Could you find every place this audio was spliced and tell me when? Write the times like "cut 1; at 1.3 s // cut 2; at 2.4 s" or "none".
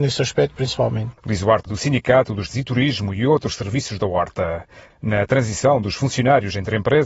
cut 1; at 1.7 s // cut 2; at 2.5 s